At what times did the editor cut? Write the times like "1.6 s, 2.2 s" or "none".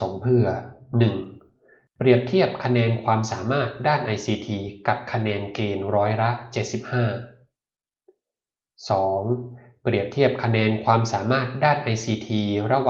none